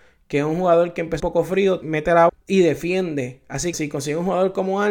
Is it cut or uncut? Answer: cut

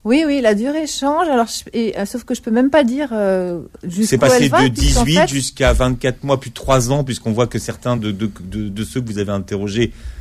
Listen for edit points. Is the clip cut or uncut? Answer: uncut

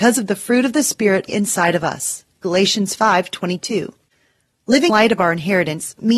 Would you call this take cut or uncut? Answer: cut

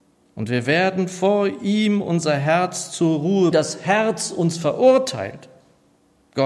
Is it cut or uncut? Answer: cut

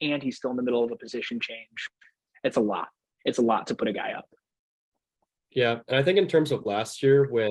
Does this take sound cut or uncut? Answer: uncut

